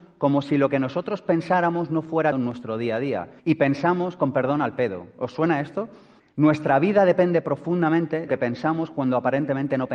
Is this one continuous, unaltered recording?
no; 4 cuts; at 2.3 s, 3.4 s, 6.2 s, 8.3 s

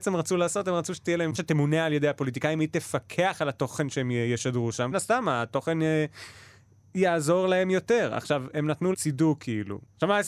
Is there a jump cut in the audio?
yes; 3 cuts; at 1.3 s, 4.9 s, 8.9 s

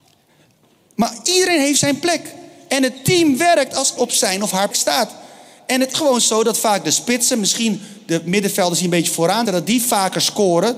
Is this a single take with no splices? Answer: no; 4 cuts; at 4.0 s, 4.7 s, 5.9 s, 9.5 s

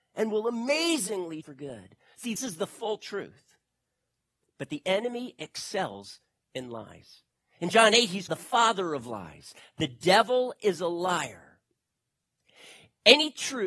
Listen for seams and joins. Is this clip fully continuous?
no; 3 cuts; at 1.4 s, 2.4 s, 8.3 s

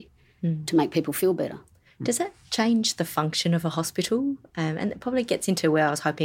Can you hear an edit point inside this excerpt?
no; 0 cuts

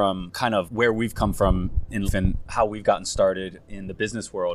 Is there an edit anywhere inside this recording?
yes; 1 cut; at 2.0 s

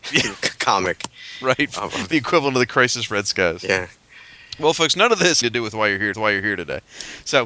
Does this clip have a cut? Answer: yes; 3 cuts; at 2.1 s, 5.4 s, 6.1 s

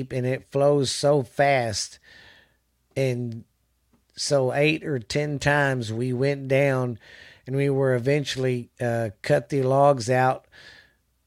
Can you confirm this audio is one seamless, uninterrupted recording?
no; 1 cut; at 8.7 s

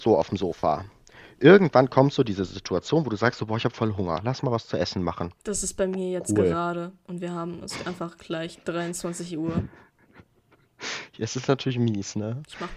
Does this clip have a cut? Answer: no; 0 cuts

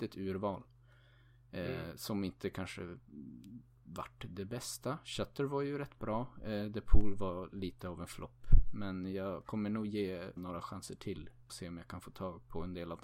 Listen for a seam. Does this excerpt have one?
yes; 2 cuts; at 10.4 s, 11.5 s

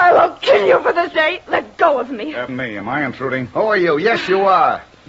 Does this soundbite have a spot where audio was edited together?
yes; 2 cuts; at 1.1 s, 2.5 s

